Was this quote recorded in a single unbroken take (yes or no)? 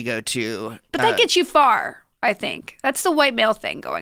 yes